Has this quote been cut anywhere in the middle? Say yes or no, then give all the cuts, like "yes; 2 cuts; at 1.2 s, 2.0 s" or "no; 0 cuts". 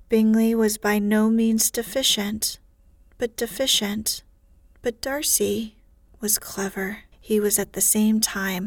yes; 2 cuts; at 3.4 s, 7.1 s